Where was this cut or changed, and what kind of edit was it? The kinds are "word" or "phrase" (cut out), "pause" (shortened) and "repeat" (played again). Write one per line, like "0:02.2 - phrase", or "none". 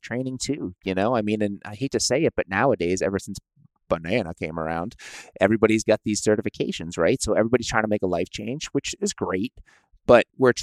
none